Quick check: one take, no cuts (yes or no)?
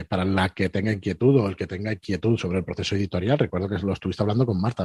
yes